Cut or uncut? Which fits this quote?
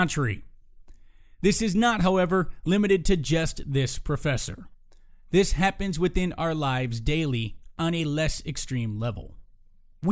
uncut